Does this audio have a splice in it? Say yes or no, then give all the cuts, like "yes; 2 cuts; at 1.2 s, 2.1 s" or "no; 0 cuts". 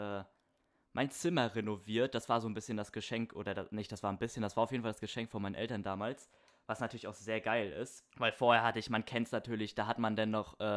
yes; 1 cut; at 8.1 s